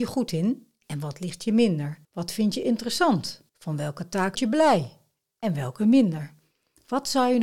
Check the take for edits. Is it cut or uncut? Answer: cut